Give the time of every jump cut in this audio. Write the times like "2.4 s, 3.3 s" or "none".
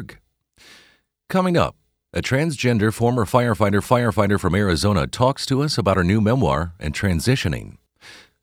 3.8 s